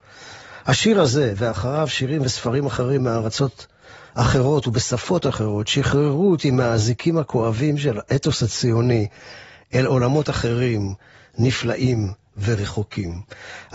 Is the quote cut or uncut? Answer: uncut